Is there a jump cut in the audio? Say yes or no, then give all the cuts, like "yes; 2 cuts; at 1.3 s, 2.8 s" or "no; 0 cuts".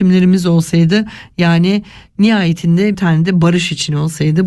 yes; 1 cut; at 2.9 s